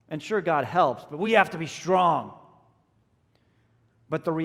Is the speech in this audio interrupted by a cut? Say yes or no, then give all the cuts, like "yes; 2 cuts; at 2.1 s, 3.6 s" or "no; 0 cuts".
no; 0 cuts